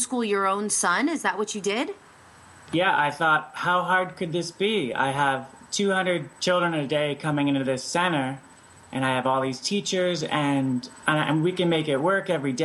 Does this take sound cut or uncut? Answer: uncut